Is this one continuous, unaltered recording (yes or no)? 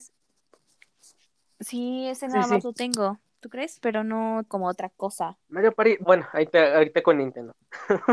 no